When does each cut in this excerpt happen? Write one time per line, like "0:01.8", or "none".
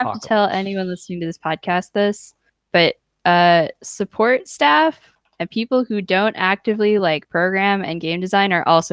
none